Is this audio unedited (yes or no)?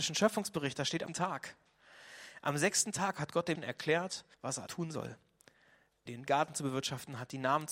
no